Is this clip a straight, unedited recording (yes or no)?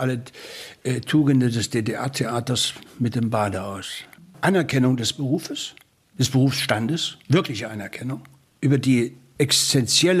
no